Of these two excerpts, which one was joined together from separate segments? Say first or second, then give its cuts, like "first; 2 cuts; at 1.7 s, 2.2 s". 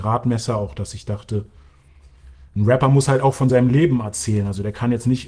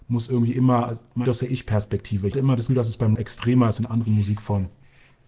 second; 5 cuts; at 1.2 s, 2.3 s, 2.7 s, 3.1 s, 3.8 s